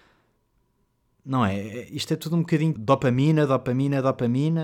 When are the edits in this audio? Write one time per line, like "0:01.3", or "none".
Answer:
0:02.8